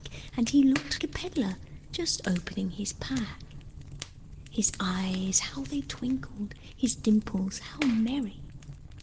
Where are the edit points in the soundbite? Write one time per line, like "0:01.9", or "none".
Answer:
0:01.0